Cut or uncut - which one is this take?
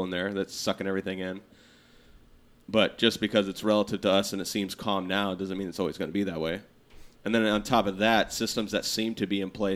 uncut